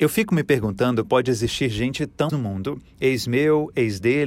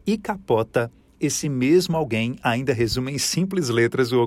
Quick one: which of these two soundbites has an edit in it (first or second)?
first